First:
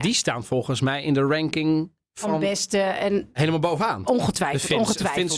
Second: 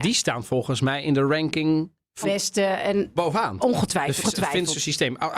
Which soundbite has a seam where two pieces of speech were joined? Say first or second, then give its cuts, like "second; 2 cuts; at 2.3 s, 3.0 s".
second; 3 cuts; at 2.2 s, 3.2 s, 4.2 s